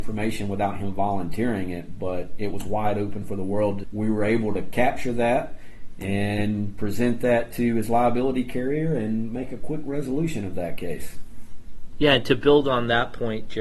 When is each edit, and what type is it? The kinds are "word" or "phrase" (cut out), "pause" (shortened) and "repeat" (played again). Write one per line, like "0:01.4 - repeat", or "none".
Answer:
0:03.8 - word